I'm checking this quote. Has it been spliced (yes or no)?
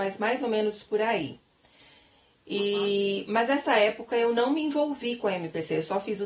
no